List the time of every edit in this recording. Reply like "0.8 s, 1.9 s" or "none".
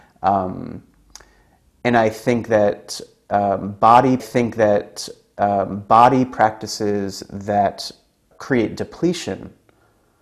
4.2 s, 8.3 s

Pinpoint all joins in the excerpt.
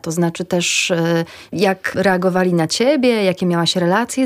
none

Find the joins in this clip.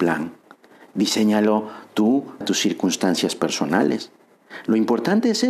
2.4 s

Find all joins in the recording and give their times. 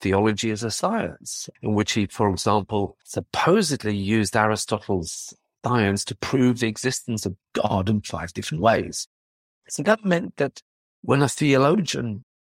none

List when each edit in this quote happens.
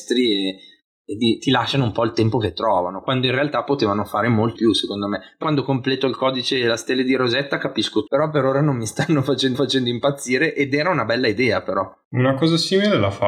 4.5 s, 5.4 s, 8.1 s, 9.5 s

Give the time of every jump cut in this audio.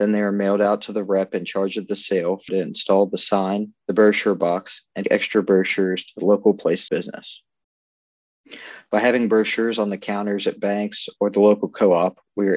2.5 s, 3.8 s, 5.0 s, 6.9 s

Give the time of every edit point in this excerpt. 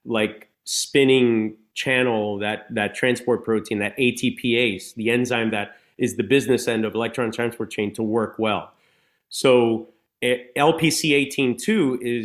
none

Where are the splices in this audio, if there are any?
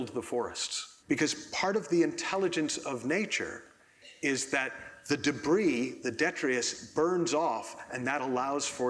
1.0 s

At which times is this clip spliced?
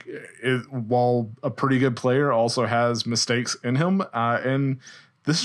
none

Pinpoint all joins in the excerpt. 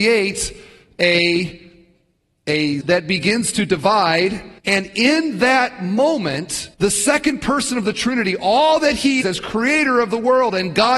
2.8 s, 4.6 s, 6.7 s, 9.2 s

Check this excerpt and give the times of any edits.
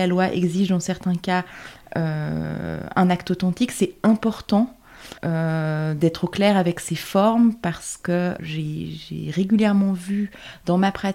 5.2 s, 8.4 s

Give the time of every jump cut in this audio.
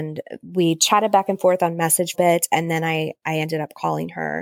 2.1 s

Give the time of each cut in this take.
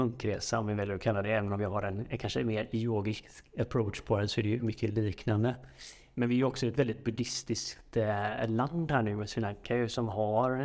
none

